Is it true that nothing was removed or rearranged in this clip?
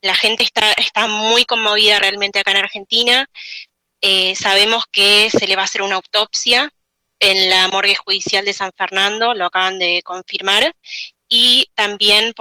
yes; 0 cuts

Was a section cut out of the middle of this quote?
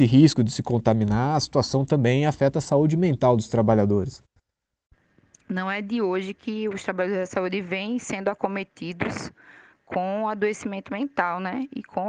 no; 0 cuts

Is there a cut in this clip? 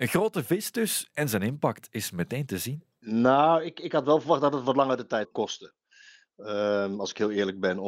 yes; 1 cut; at 5.2 s

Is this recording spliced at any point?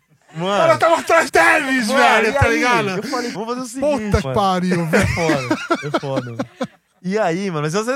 yes; 3 cuts; at 1.3 s, 3.3 s, 4.2 s

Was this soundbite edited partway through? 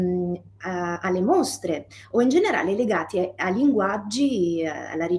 no; 0 cuts

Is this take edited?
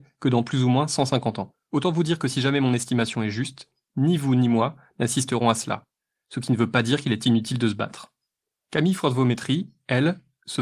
no; 0 cuts

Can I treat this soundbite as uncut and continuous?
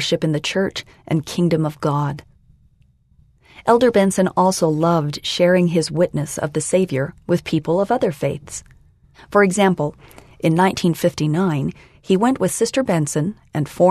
yes; 0 cuts

